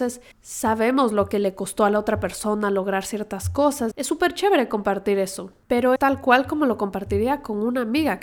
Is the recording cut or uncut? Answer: cut